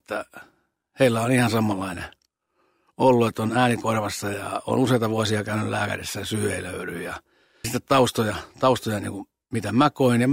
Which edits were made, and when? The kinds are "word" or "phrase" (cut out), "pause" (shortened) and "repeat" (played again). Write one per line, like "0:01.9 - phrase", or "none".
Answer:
0:07.6 - word